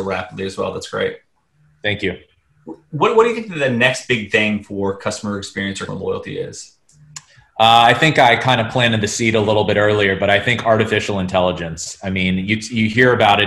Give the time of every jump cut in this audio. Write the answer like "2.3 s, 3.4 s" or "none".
5.9 s